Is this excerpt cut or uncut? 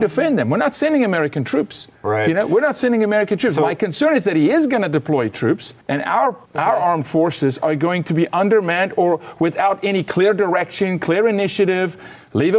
cut